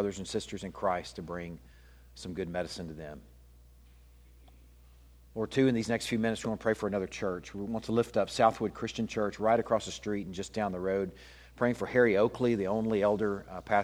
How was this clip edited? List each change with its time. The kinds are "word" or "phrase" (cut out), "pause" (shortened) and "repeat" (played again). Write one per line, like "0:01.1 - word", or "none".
none